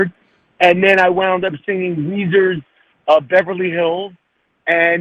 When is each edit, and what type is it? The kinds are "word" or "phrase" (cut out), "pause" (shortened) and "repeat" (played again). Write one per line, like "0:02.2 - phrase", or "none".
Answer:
none